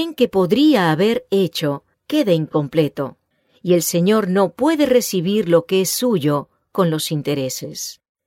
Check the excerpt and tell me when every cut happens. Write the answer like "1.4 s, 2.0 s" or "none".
1.9 s, 3.3 s